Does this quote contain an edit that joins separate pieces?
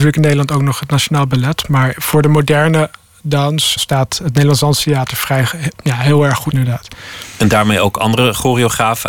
yes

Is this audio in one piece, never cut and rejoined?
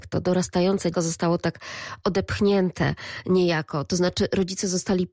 no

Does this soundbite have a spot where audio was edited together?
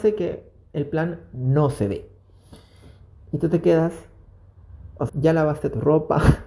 yes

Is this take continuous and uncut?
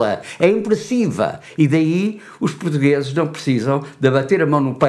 yes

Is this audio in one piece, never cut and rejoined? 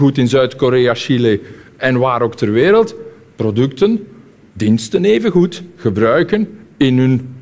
yes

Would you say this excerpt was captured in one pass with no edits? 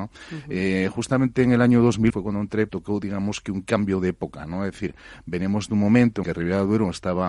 no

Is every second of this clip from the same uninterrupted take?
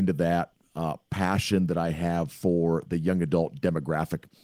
yes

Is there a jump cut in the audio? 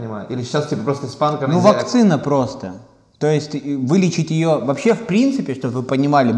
no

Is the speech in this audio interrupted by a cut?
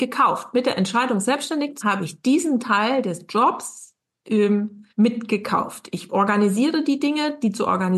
yes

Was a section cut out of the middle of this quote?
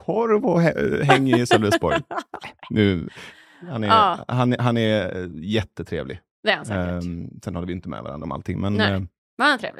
yes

